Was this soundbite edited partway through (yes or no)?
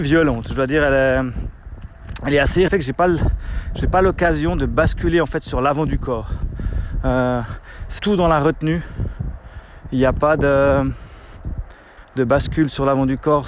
yes